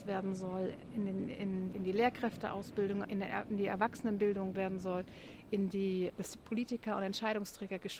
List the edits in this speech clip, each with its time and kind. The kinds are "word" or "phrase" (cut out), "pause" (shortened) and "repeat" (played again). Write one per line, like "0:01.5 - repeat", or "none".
0:01.7 - word
0:03.0 - phrase
0:04.5 - word
0:06.1 - word